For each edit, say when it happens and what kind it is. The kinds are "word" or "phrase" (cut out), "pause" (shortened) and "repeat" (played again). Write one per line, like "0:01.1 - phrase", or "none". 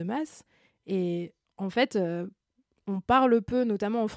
none